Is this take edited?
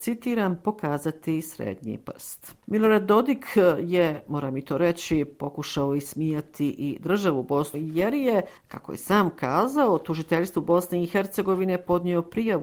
yes; 2 cuts; at 7.7 s, 8.6 s

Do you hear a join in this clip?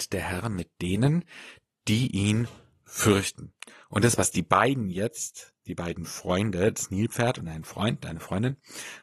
no; 0 cuts

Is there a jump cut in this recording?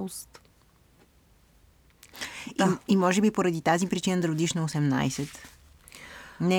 no; 0 cuts

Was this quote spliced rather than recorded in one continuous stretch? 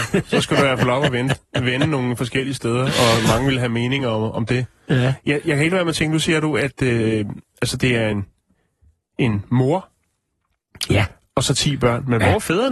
no; 0 cuts

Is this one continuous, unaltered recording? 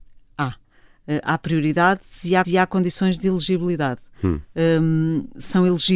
no; 1 cut; at 2.4 s

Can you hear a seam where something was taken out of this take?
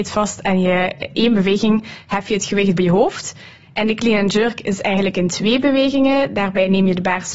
yes; 2 cuts; at 1.1 s, 2.8 s

